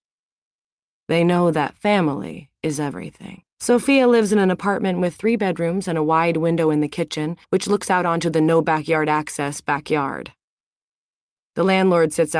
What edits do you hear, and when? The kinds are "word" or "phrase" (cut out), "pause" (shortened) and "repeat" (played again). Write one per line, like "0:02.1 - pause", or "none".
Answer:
0:02.6 - pause
0:03.5 - pause
0:07.4 - pause